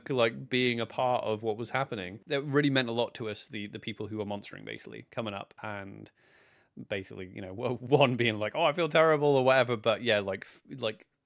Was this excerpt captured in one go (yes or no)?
yes